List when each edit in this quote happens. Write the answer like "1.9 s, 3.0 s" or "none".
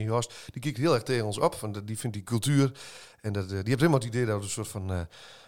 none